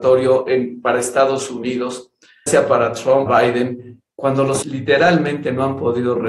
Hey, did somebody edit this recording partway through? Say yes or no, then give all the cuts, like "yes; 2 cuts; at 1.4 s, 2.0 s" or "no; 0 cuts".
yes; 3 cuts; at 2.5 s, 3.3 s, 4.6 s